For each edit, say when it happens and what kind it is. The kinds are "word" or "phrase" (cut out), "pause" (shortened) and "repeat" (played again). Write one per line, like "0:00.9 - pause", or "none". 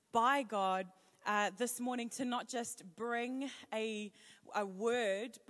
none